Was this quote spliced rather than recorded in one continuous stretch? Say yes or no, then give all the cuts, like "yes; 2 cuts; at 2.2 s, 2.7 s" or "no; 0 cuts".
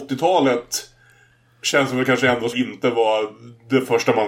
yes; 1 cut; at 2.5 s